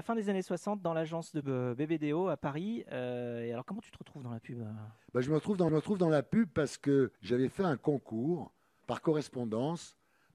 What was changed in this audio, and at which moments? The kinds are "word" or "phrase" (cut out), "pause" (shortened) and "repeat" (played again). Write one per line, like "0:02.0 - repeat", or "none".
0:01.4 - word
0:05.7 - repeat
0:07.2 - pause
0:08.8 - word